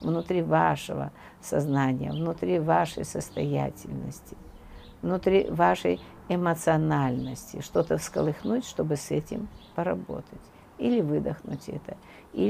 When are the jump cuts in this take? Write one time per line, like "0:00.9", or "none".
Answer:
none